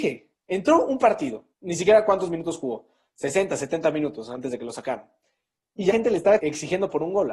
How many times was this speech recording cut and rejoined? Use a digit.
3